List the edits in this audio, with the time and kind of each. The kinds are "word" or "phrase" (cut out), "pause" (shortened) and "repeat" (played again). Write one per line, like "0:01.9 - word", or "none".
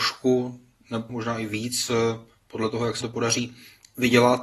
0:01.1 - word
0:03.0 - word